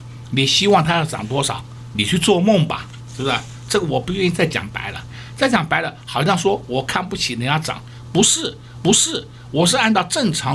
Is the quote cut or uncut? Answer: cut